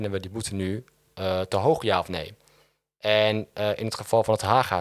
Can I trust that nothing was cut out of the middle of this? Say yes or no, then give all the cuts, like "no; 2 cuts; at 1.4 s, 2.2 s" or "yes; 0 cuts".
yes; 0 cuts